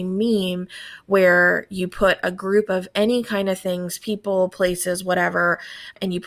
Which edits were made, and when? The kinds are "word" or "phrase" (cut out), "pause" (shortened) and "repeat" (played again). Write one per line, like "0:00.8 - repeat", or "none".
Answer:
none